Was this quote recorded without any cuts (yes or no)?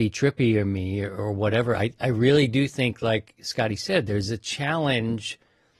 yes